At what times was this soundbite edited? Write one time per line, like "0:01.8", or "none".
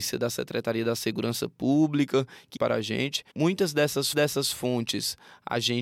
0:02.6
0:03.3
0:04.1